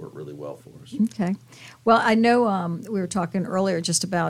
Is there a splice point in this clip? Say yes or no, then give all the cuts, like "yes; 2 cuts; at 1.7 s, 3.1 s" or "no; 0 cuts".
no; 0 cuts